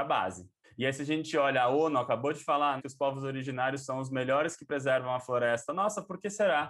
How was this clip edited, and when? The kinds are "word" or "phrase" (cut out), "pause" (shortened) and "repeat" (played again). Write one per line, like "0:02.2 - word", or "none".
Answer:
0:02.8 - word